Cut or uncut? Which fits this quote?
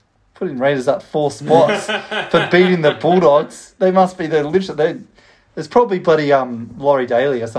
uncut